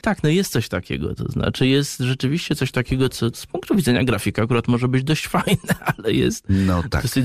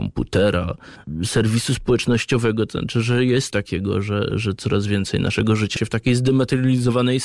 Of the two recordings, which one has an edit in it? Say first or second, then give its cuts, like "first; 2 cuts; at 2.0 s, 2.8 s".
second; 3 cuts; at 3.5 s, 4.3 s, 5.8 s